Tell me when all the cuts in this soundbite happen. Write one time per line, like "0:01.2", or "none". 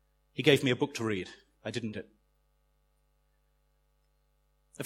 0:01.9